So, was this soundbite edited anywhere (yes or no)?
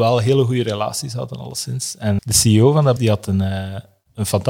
yes